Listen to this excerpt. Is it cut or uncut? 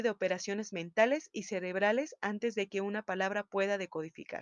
uncut